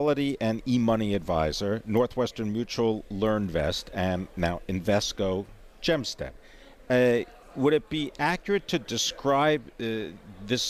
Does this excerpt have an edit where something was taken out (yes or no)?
no